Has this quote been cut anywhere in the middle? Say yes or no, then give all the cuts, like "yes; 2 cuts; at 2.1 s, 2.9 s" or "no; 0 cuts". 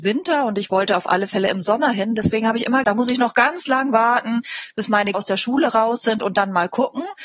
yes; 2 cuts; at 2.8 s, 5.1 s